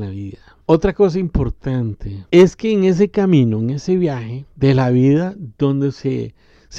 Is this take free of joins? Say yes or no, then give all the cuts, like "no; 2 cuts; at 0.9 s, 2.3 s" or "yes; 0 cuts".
yes; 0 cuts